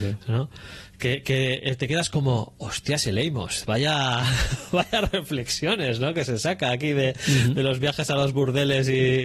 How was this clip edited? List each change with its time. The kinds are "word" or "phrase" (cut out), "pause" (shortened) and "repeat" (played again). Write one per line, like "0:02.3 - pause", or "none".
none